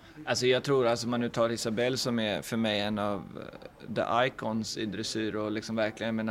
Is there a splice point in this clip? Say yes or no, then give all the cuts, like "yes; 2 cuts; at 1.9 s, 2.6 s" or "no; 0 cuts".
no; 0 cuts